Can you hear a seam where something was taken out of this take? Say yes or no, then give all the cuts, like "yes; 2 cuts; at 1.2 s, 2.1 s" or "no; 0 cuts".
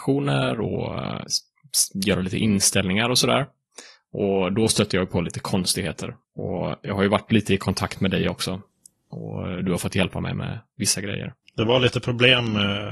no; 0 cuts